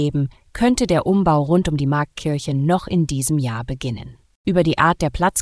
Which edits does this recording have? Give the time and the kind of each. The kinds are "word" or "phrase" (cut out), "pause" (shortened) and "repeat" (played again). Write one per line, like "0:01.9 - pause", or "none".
none